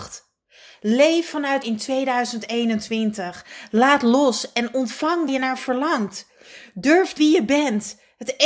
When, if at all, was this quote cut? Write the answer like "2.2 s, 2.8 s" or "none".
1.6 s, 5.3 s, 7.2 s